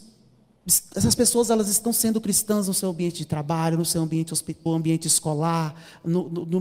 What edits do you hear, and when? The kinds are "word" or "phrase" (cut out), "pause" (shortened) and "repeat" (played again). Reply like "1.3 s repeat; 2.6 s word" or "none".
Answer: 4.7 s phrase